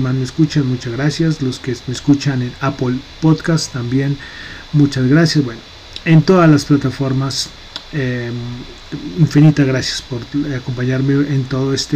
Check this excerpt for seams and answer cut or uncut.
uncut